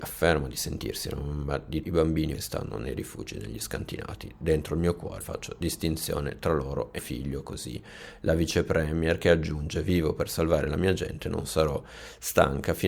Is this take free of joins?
no; 4 cuts; at 1.8 s, 2.3 s, 5.2 s, 7.0 s

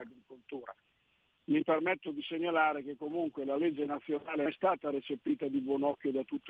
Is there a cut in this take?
yes; 1 cut; at 4.5 s

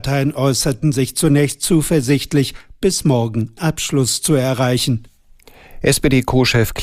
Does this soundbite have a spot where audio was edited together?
yes; 1 cut; at 3.6 s

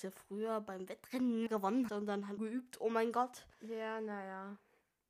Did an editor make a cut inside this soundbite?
yes; 4 cuts; at 1.5 s, 1.9 s, 2.4 s, 3.5 s

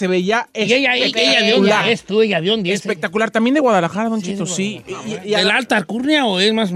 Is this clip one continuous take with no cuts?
yes; 0 cuts

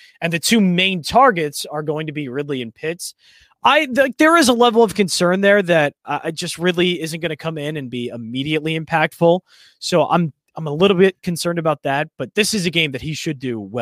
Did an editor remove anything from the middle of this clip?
no; 0 cuts

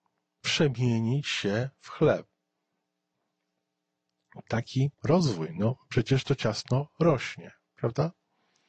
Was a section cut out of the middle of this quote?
yes; 1 cut; at 4.9 s

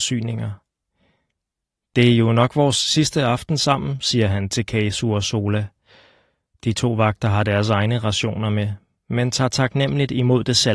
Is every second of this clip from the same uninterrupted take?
yes; 0 cuts

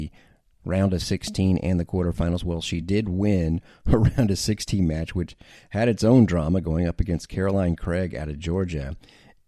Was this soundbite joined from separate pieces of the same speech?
no; 0 cuts

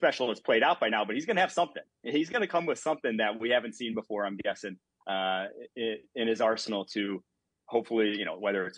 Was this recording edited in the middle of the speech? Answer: no; 0 cuts

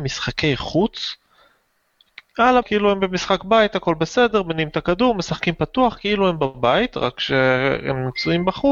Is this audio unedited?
no; 1 cut; at 2.6 s

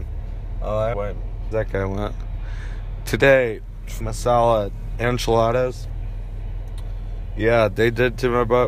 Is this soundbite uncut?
no; 3 cuts; at 0.9 s, 1.5 s, 4.0 s

